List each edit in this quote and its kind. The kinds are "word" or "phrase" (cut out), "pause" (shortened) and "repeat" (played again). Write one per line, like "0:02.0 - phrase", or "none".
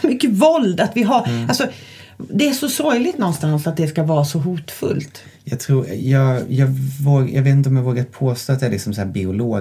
none